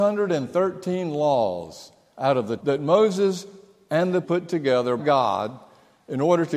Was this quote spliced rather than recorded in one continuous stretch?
yes; 3 cuts; at 2.6 s, 4.2 s, 5.0 s

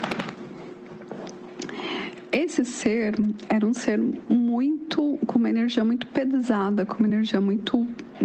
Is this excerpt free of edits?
yes; 0 cuts

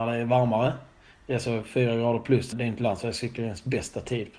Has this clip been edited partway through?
yes; 1 cut; at 2.5 s

